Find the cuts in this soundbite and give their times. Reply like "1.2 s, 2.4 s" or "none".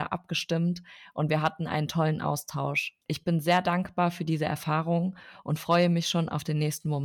3.0 s